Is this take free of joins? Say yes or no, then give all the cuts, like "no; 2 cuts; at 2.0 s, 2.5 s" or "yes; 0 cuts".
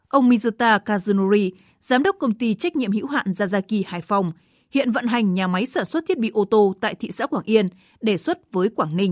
yes; 0 cuts